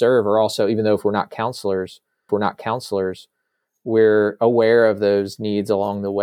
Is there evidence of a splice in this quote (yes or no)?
yes